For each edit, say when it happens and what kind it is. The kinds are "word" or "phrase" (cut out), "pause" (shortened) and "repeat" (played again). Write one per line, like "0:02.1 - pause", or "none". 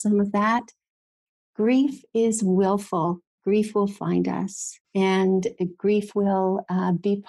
0:04.8 - pause